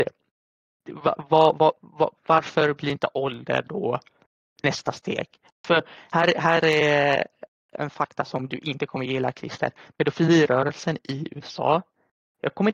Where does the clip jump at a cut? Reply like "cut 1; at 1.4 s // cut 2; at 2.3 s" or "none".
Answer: none